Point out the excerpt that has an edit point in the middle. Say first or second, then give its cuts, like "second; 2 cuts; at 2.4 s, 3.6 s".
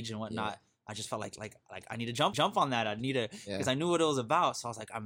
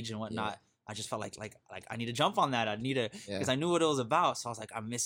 first; 1 cut; at 2.3 s